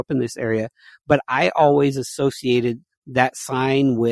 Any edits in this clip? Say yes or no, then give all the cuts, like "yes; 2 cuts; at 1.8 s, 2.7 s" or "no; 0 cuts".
no; 0 cuts